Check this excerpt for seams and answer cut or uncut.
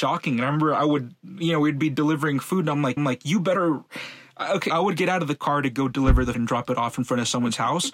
cut